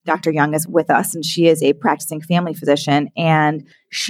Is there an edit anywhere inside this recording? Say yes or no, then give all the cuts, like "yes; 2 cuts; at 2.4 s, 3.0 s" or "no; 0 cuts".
no; 0 cuts